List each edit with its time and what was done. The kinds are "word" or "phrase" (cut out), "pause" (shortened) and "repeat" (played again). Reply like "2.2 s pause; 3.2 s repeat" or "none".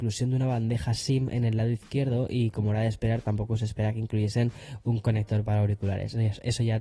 none